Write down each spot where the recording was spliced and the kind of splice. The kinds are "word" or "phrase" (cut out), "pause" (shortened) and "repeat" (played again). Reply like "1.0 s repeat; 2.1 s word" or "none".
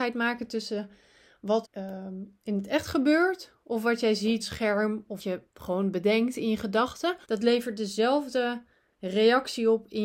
1.6 s word; 4.4 s phrase; 5.2 s word; 7.2 s pause

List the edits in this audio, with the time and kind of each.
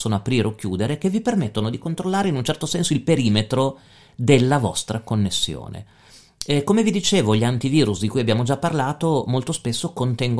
none

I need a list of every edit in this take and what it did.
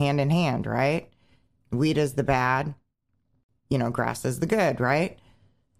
none

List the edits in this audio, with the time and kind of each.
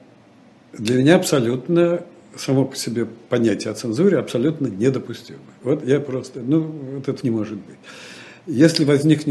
7.2 s word

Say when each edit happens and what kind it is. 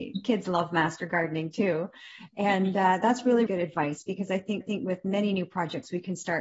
3.5 s word; 4.6 s repeat

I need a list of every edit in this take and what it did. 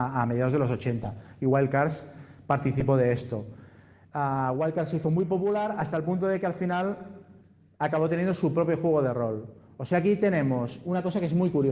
none

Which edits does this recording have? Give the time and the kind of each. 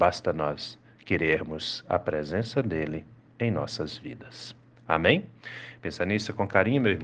none

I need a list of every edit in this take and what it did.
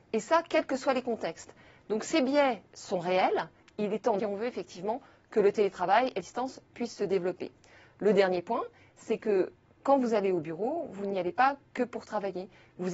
4.2 s phrase; 6.2 s phrase

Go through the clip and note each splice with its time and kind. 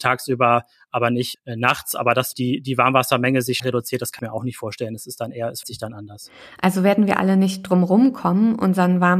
1.3 s word; 2.3 s word; 3.6 s word; 4.2 s word; 5.6 s word

